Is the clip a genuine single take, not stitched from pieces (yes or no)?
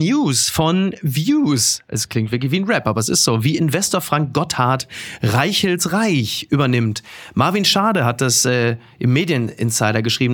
yes